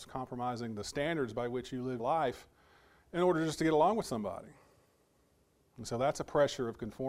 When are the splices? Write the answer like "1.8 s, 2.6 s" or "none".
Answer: 2.0 s